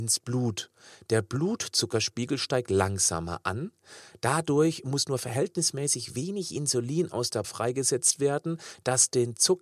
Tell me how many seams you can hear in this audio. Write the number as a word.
one